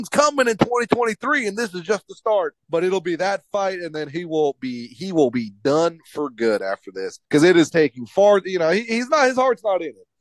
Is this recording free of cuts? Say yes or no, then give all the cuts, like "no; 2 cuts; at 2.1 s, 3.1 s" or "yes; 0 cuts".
no; 2 cuts; at 2.6 s, 7.2 s